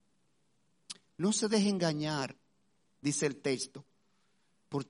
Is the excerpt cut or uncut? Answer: uncut